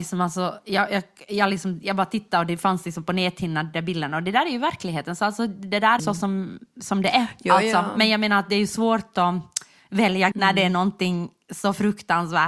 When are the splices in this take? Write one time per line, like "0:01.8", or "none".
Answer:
0:06.0
0:10.3